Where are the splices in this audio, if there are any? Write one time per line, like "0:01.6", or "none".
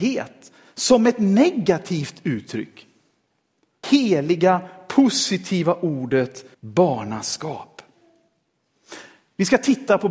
0:03.8
0:06.5